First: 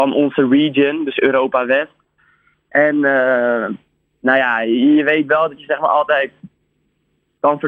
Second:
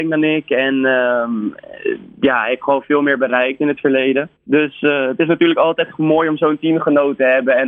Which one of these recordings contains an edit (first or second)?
second